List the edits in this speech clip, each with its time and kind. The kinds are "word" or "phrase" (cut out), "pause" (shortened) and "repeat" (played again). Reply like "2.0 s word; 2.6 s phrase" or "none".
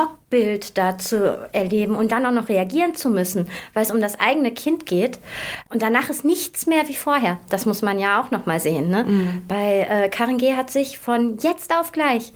none